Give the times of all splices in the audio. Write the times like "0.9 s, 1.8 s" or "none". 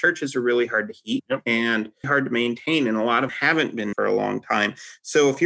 2.0 s, 3.3 s, 3.9 s